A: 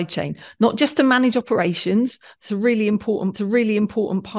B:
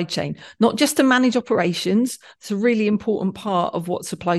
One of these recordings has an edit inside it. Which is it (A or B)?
A